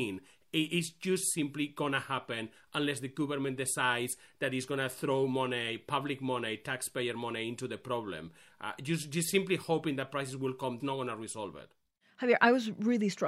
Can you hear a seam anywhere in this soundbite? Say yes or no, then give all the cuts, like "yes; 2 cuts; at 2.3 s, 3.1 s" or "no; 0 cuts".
yes; 1 cut; at 10.8 s